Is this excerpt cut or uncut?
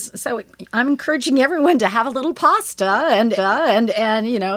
cut